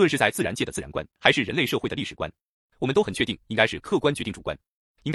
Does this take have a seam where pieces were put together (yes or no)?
yes